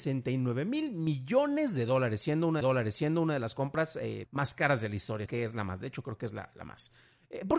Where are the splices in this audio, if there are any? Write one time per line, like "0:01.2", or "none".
0:02.6
0:04.2
0:05.3